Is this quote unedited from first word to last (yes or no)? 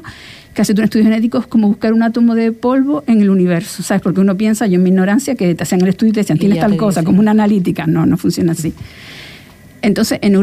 yes